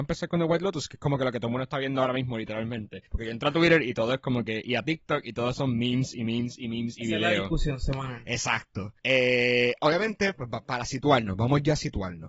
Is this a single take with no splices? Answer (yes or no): no